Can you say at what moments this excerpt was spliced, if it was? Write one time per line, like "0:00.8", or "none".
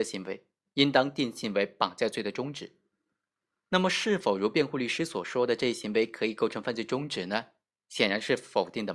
none